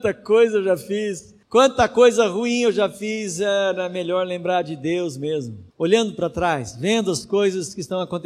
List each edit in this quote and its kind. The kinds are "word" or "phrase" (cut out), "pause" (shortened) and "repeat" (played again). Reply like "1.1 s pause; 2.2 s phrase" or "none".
1.4 s pause; 5.7 s pause